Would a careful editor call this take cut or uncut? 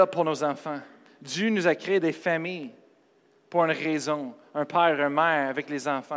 uncut